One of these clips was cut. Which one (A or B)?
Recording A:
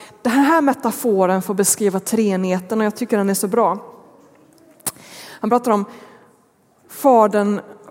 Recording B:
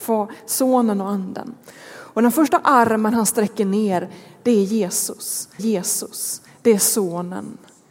B